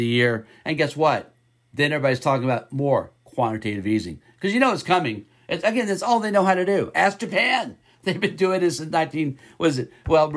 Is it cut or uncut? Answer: uncut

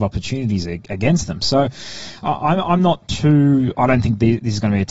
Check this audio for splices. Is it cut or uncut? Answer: uncut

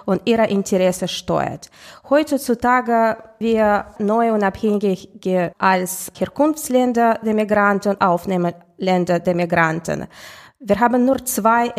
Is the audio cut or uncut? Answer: cut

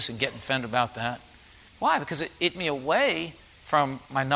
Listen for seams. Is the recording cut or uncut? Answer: cut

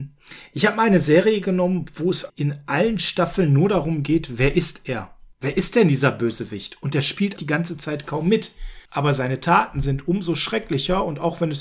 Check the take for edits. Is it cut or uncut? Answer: cut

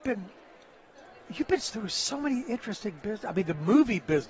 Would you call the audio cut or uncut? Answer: uncut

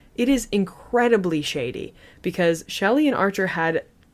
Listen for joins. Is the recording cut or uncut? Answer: uncut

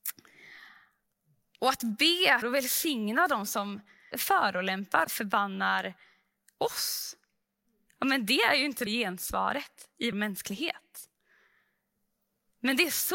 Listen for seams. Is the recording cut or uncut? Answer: cut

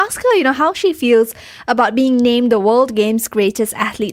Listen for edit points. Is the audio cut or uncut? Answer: uncut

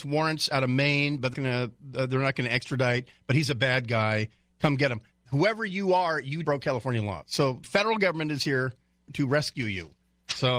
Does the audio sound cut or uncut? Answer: cut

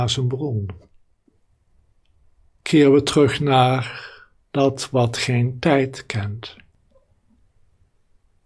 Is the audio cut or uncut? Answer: uncut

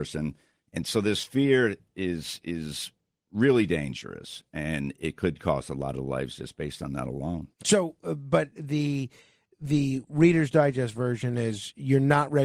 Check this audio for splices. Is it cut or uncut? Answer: cut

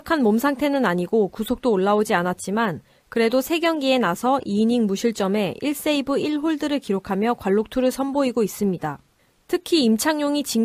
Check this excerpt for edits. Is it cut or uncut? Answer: uncut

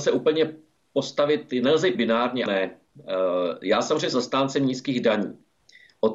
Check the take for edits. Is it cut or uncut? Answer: cut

